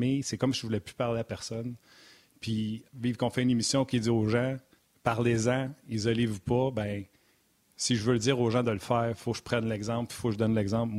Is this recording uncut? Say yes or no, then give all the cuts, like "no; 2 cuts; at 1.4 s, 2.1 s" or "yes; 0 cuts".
no; 2 cuts; at 2.9 s, 4.8 s